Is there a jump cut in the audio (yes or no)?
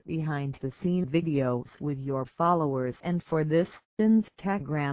yes